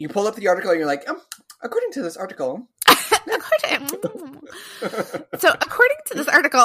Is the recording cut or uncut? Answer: uncut